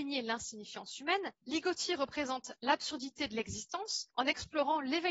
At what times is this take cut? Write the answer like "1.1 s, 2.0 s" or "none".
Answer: 1.4 s, 4.1 s